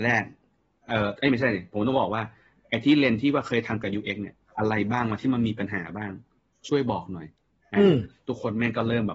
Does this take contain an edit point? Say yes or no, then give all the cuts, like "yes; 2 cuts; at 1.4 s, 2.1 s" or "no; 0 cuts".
no; 0 cuts